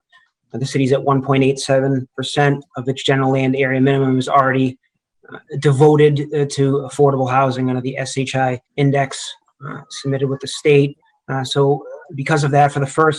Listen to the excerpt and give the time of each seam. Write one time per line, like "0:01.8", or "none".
0:05.5
0:08.6
0:12.0